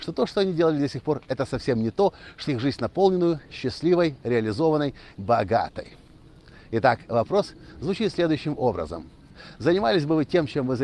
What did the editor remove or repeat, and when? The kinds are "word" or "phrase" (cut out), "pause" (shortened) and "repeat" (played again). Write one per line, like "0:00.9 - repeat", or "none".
0:02.5 - word
0:05.1 - phrase